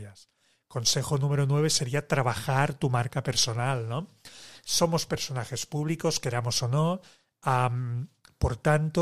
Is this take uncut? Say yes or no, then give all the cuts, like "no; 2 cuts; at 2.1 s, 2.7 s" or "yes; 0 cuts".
yes; 0 cuts